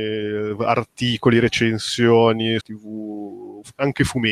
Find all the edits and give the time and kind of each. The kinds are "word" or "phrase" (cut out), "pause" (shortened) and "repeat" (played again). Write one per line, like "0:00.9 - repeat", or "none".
0:02.6 - phrase